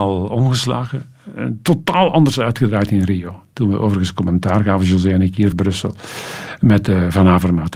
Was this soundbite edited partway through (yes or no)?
yes